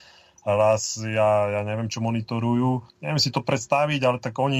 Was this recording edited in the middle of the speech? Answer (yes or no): yes